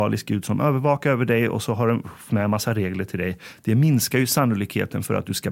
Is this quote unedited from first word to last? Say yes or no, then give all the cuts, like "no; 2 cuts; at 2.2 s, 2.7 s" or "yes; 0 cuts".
no; 1 cut; at 2.3 s